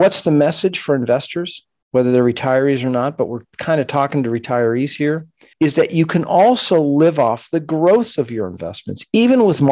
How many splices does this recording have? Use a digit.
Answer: 1